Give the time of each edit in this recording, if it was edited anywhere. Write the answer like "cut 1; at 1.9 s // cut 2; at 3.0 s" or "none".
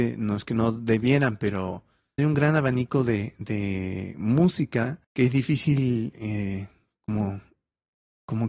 cut 1; at 2.2 s // cut 2; at 5.0 s

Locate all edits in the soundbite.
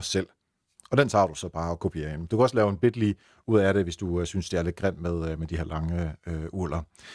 none

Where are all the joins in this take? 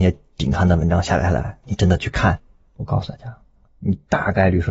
none

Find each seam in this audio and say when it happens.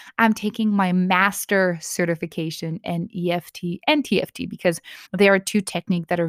cut 1; at 5.1 s

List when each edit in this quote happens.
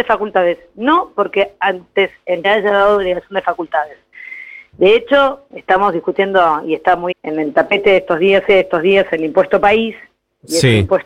cut 1; at 2.4 s // cut 2; at 5.5 s // cut 3; at 7.1 s // cut 4; at 8.5 s

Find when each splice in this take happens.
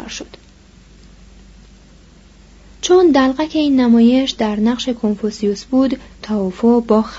cut 1; at 6.2 s

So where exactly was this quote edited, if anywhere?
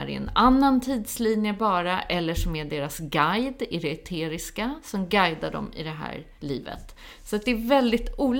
cut 1; at 6.4 s

